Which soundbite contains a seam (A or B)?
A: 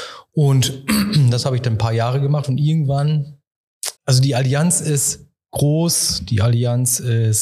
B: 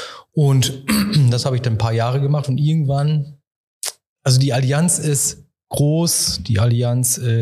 A